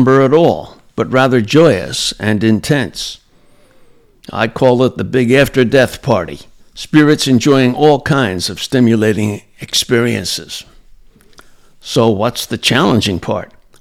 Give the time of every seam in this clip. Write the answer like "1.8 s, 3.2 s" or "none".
6.6 s